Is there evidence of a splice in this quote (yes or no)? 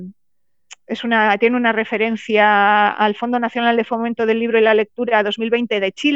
no